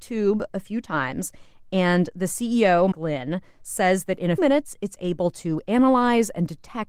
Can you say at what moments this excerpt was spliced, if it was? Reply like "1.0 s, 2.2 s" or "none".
2.9 s, 4.4 s